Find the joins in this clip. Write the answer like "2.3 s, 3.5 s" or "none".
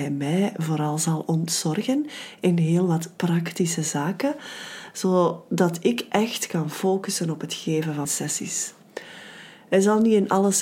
8.0 s